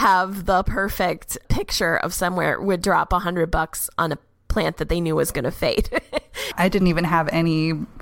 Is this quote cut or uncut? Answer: uncut